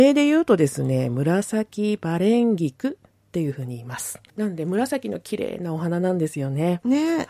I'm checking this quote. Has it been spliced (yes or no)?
yes